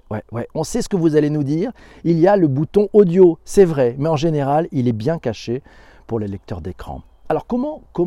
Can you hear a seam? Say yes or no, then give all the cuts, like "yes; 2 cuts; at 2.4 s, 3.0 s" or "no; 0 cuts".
no; 0 cuts